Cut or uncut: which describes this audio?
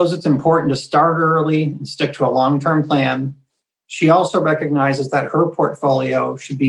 uncut